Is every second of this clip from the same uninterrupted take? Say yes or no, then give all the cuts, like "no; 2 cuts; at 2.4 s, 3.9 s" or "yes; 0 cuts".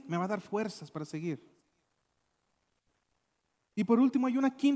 yes; 0 cuts